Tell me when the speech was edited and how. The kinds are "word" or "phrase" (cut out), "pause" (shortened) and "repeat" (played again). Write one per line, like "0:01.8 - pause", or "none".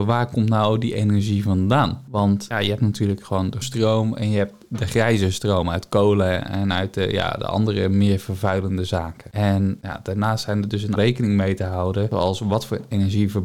0:03.6 - word
0:11.0 - phrase